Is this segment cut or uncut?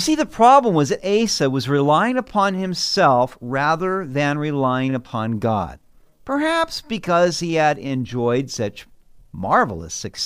uncut